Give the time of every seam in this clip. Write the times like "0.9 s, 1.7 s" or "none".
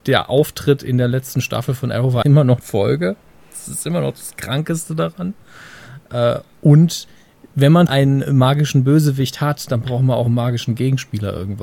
2.2 s, 2.6 s, 7.9 s